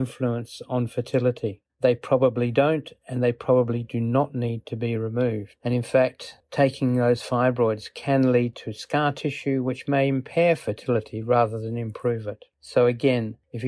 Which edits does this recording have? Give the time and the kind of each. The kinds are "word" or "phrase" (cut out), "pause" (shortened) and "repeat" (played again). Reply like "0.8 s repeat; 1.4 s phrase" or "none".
none

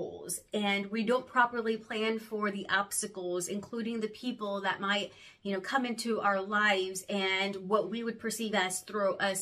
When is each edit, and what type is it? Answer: none

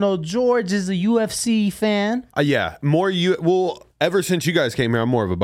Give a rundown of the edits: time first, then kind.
2.3 s pause; 3.9 s pause

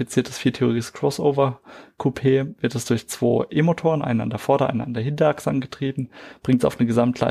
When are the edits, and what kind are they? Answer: none

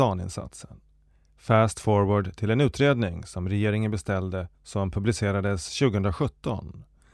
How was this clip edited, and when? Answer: 4.5 s pause

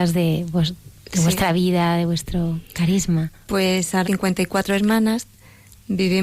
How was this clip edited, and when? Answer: 3.4 s pause; 4.0 s phrase

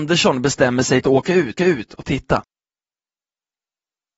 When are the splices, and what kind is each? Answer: 1.0 s phrase; 1.6 s repeat

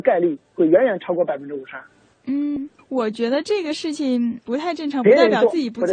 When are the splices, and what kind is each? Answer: 2.8 s phrase

